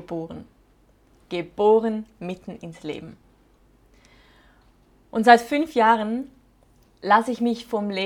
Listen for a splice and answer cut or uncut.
uncut